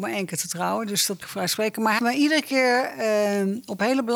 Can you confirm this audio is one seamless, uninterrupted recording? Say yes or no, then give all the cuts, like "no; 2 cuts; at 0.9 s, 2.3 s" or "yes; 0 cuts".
no; 2 cuts; at 1.2 s, 2.0 s